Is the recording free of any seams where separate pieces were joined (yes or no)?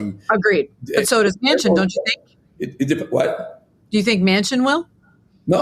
yes